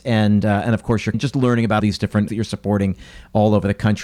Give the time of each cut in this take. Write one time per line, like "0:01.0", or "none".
0:01.1
0:01.8
0:02.3